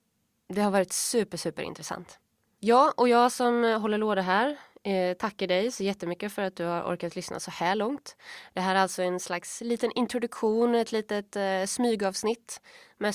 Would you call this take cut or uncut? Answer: uncut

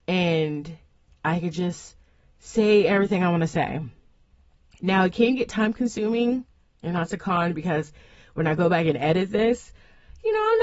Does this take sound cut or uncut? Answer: uncut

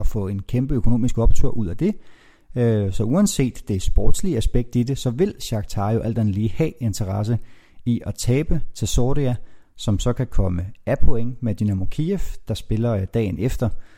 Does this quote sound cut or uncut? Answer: uncut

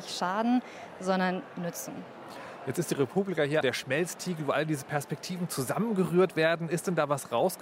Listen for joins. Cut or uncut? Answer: cut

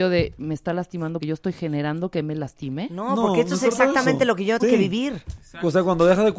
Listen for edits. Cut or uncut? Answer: cut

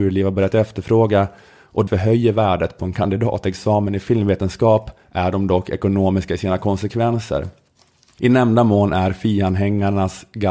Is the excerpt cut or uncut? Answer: cut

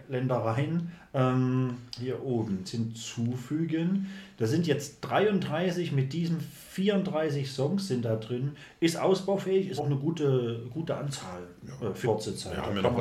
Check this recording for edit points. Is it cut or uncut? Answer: cut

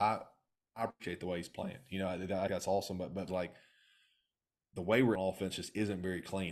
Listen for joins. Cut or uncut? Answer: cut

